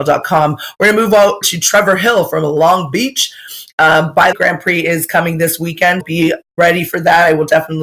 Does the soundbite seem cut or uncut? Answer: cut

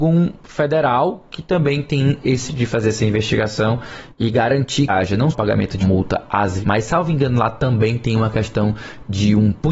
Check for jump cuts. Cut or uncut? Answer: cut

